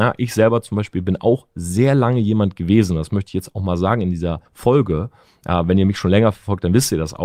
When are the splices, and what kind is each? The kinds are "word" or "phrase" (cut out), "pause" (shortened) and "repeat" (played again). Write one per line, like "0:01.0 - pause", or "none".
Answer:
0:04.5 - pause